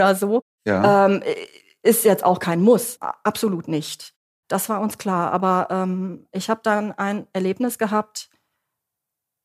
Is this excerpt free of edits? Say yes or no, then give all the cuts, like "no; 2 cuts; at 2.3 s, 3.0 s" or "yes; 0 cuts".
no; 1 cut; at 3.0 s